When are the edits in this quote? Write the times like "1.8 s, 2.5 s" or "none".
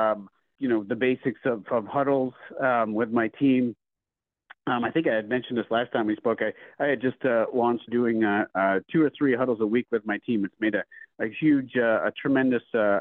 7.9 s